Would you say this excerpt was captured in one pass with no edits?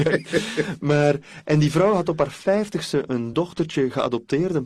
yes; 0 cuts

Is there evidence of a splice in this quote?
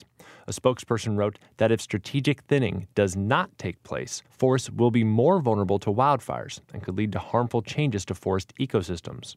yes; 1 cut; at 4.3 s

